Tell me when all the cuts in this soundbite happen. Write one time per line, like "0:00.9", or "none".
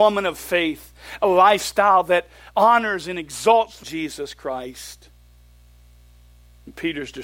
0:03.8